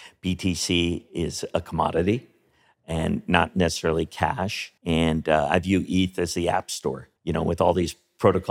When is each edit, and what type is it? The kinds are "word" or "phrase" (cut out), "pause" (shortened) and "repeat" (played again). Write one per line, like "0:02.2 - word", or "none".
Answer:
0:04.8 - pause
0:07.2 - pause